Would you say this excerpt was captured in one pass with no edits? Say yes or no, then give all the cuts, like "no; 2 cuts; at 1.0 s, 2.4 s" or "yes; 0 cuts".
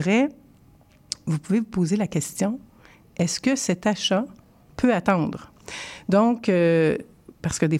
yes; 0 cuts